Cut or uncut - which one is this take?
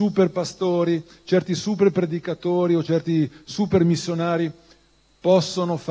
uncut